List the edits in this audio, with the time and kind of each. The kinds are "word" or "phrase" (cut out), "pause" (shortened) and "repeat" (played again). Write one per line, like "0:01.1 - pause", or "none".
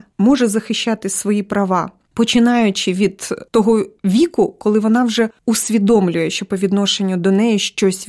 none